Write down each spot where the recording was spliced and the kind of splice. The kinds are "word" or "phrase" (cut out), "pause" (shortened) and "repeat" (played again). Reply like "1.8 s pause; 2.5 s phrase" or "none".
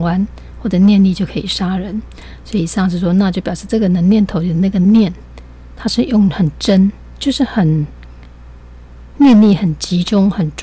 none